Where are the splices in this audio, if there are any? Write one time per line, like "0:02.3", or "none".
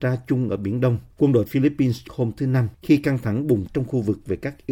0:01.1
0:02.1
0:02.7
0:03.7